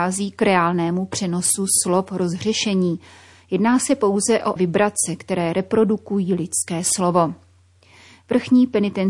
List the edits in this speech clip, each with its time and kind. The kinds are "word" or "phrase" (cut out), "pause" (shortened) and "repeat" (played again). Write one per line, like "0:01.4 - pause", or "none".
0:04.6 - word